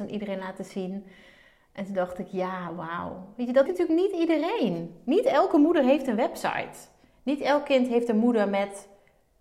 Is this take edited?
yes; 1 cut; at 3.7 s

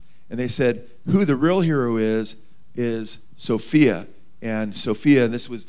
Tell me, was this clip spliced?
no; 0 cuts

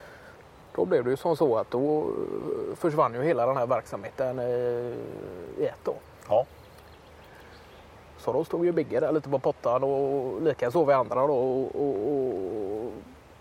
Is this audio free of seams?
yes; 0 cuts

